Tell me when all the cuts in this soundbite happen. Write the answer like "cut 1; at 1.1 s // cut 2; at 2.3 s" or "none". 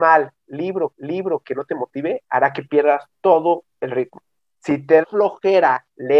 cut 1; at 0.9 s // cut 2; at 4.4 s // cut 3; at 5.0 s